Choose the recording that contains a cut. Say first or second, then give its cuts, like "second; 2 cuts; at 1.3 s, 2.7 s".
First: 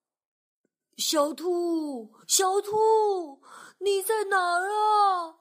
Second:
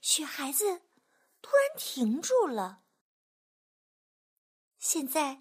first; 1 cut; at 2.2 s